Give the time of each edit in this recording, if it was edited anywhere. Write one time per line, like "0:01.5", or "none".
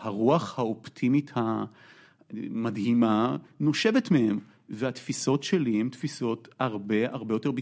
none